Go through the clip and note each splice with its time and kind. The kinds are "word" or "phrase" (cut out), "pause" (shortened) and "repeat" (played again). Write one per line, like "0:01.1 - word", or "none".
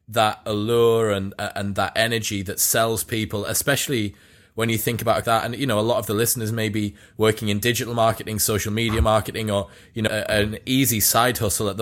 0:05.2 - phrase
0:10.1 - word